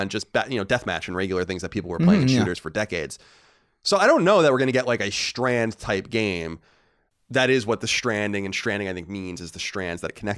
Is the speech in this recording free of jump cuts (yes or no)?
yes